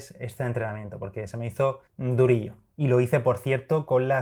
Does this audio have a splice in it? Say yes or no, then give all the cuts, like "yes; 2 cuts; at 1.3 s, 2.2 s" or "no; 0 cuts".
yes; 1 cut; at 1.9 s